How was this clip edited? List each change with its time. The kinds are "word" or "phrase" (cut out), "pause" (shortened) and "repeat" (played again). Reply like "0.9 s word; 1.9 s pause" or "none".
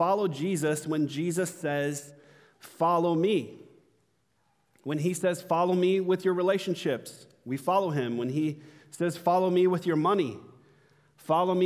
none